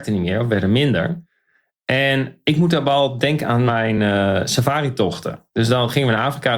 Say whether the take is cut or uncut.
uncut